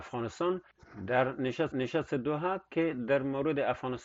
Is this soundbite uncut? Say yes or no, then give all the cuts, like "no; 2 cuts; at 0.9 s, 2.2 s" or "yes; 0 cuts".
no; 1 cut; at 1.7 s